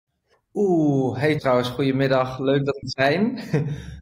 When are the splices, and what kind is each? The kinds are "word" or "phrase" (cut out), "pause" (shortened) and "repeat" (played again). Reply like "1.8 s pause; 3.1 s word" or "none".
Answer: 1.4 s word; 2.8 s word